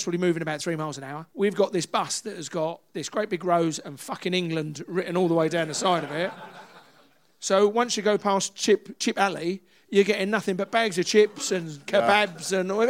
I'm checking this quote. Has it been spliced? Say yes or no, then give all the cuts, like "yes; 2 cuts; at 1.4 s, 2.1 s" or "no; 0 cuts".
yes; 1 cut; at 1.3 s